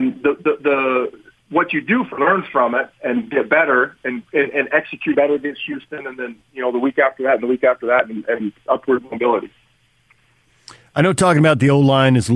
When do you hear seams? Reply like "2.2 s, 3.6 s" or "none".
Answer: 2.2 s, 5.1 s